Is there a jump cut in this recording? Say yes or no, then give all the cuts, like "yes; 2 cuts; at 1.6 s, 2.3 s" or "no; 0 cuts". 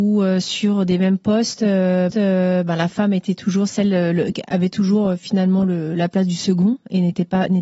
yes; 1 cut; at 2.1 s